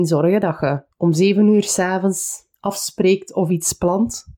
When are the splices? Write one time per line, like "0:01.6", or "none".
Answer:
0:00.9
0:02.5